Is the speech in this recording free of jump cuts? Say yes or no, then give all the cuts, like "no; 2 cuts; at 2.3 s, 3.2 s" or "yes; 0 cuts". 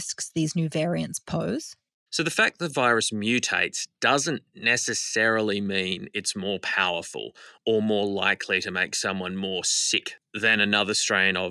yes; 0 cuts